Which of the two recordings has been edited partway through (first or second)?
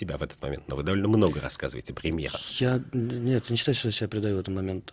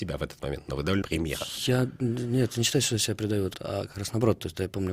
second